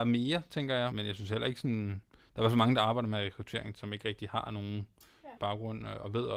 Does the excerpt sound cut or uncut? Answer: cut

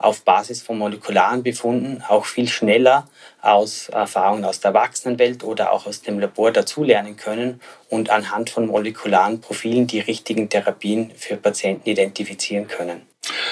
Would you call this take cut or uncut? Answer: uncut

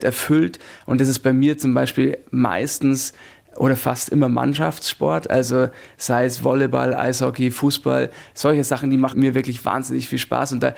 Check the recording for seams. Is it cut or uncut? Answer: uncut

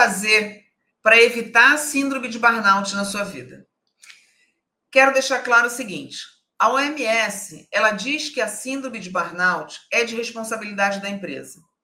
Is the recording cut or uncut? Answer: uncut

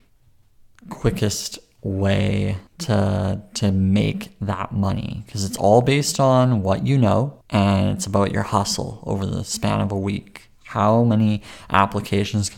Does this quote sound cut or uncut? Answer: cut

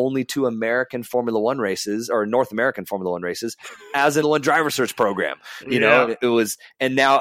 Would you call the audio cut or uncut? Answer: cut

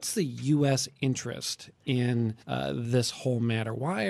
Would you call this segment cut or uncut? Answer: cut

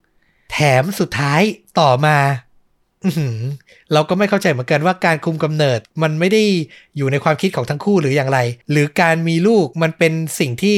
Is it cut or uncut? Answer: cut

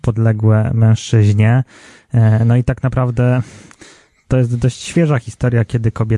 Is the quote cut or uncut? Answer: uncut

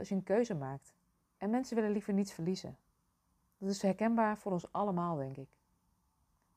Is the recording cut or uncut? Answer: uncut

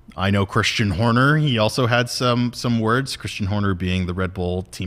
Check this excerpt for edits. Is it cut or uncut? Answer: uncut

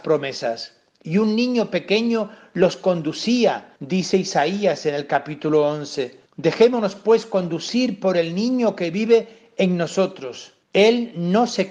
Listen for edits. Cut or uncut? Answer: cut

